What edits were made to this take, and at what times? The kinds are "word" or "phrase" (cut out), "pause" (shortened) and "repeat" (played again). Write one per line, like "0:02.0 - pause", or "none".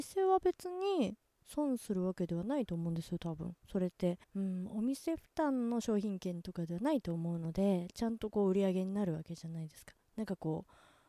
0:04.2 - pause